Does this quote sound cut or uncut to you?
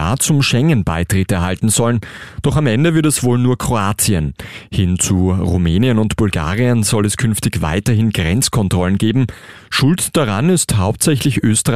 uncut